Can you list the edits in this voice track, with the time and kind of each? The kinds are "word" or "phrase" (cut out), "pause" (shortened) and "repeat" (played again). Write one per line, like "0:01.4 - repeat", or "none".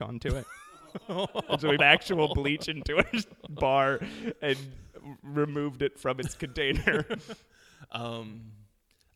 0:01.8 - word